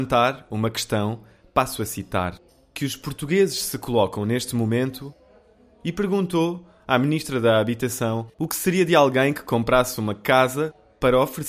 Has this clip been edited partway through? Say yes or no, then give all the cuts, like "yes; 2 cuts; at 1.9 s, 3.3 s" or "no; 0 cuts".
yes; 1 cut; at 8.3 s